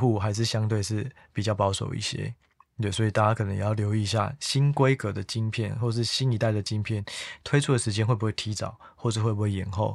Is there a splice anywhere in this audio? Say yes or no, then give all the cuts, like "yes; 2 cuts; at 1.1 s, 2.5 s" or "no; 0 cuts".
no; 0 cuts